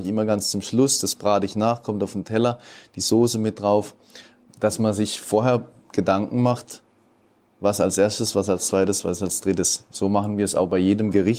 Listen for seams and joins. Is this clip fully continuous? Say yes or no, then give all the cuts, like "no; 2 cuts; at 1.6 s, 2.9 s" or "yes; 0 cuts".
yes; 0 cuts